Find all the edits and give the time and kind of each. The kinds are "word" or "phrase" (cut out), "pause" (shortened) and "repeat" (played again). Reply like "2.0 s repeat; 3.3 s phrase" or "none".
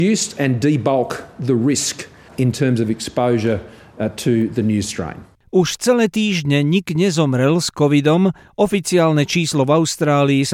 none